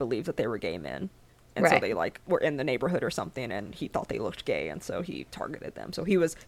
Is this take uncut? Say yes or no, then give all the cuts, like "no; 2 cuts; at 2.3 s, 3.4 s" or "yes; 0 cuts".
yes; 0 cuts